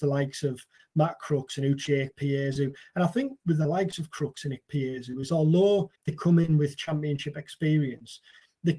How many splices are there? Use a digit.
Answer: 2